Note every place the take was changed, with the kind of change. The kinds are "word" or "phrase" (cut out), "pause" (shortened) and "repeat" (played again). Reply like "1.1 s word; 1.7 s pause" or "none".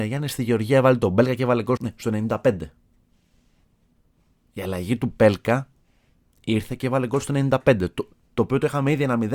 1.8 s word